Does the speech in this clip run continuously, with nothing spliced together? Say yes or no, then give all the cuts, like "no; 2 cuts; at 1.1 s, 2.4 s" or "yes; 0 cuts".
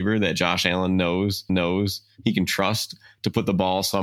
no; 1 cut; at 1.5 s